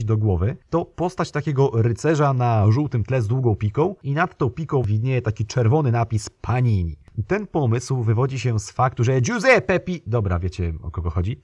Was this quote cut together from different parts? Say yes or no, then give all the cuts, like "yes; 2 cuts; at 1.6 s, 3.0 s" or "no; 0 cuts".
no; 0 cuts